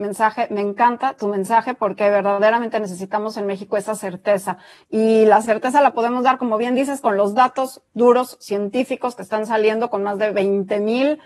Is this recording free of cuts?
yes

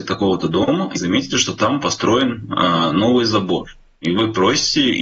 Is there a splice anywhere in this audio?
yes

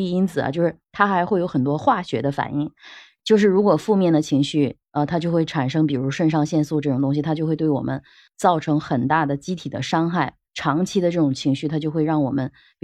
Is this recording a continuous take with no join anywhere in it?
yes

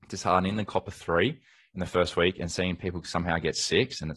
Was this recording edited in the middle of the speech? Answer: no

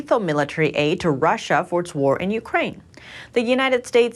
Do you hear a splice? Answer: no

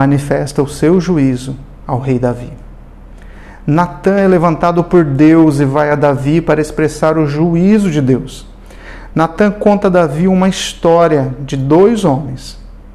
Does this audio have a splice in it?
no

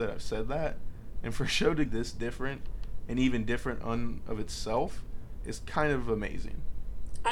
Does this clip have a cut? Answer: yes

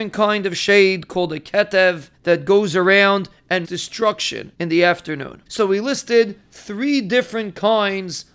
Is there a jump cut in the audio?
yes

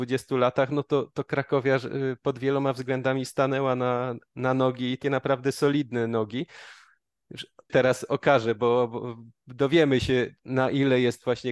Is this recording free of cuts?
no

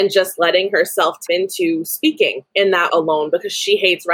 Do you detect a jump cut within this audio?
yes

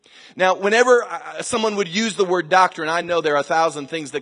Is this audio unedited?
yes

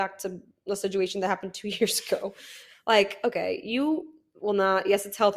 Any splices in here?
no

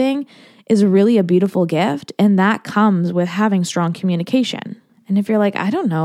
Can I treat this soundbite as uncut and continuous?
no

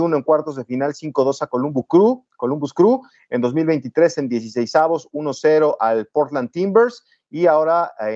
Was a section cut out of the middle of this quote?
no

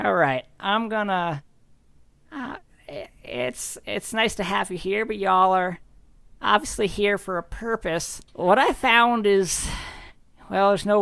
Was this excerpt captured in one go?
no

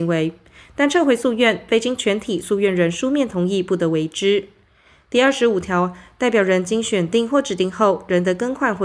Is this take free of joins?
yes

